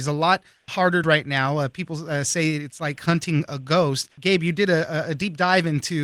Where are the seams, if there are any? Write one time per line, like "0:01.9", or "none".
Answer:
0:01.0
0:04.1